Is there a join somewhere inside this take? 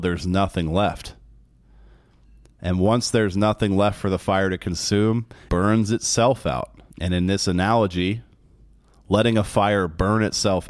yes; 2 cuts; at 5.5 s, 6.9 s

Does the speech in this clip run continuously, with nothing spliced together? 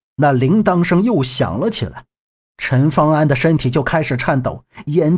yes; 0 cuts

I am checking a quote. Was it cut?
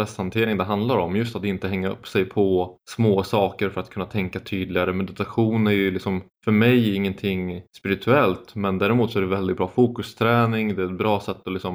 yes; 3 cuts; at 2.8 s, 6.3 s, 7.7 s

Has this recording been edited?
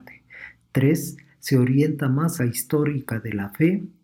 yes; 1 cut; at 2.4 s

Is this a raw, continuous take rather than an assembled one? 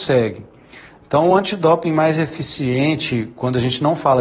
yes; 0 cuts

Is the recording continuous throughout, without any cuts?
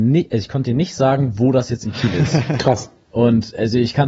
yes; 0 cuts

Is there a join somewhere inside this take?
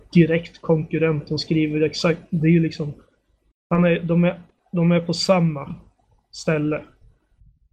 no; 0 cuts

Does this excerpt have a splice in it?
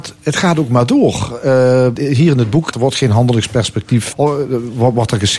yes; 3 cuts; at 2.0 s, 2.7 s, 4.1 s

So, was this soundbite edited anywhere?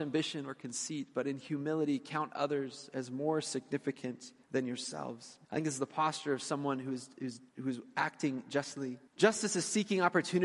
yes; 4 cuts; at 4.4 s, 5.4 s, 7.5 s, 9.1 s

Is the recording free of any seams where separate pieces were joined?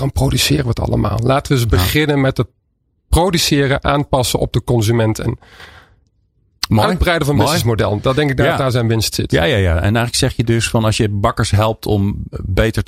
yes; 0 cuts

